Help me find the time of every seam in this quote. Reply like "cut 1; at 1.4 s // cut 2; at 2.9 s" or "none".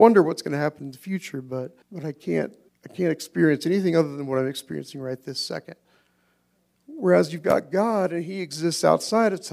cut 1; at 1.8 s // cut 2; at 2.7 s